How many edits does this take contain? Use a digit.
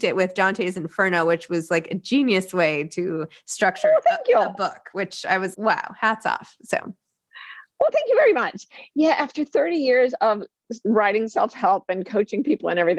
1